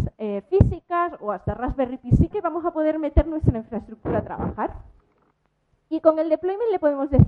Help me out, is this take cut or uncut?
cut